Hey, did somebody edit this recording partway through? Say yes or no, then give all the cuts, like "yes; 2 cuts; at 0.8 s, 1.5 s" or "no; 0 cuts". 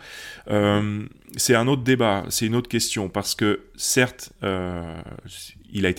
no; 0 cuts